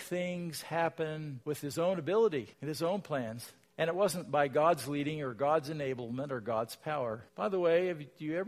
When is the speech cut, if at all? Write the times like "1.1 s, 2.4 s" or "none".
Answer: 1.4 s, 2.5 s, 3.6 s, 7.3 s